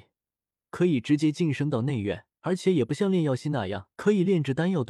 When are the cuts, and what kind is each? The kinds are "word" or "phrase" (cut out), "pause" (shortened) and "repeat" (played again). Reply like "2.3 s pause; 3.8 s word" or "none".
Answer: 2.3 s pause; 3.9 s pause

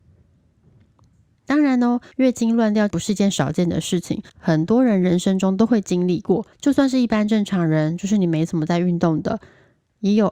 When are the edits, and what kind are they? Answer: 2.1 s pause; 4.3 s pause; 6.5 s pause

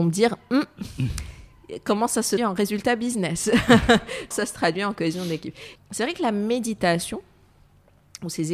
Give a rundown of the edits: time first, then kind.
2.4 s word; 4.3 s word; 5.8 s word

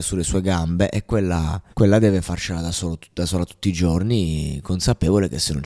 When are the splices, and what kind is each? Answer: 1.7 s pause

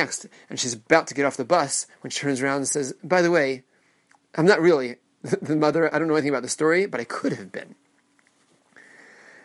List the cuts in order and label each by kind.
none

